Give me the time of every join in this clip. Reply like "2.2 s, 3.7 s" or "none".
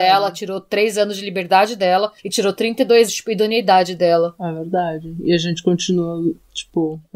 2.2 s, 3.1 s